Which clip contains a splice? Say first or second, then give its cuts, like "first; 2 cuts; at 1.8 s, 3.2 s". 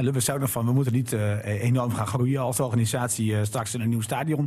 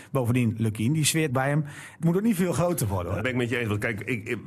second; 3 cuts; at 1.3 s, 2.0 s, 3.2 s